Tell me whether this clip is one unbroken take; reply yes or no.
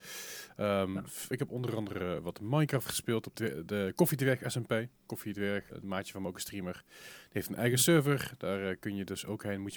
no